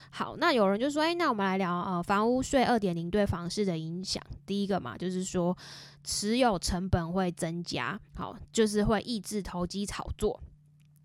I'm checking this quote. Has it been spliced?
yes; 1 cut; at 8.1 s

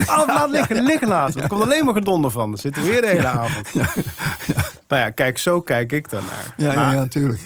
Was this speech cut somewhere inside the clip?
no; 0 cuts

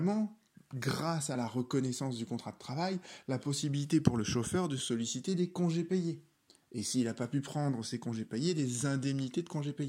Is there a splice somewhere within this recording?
no; 0 cuts

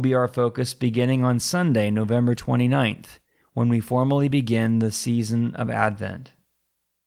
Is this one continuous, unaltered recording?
yes; 0 cuts

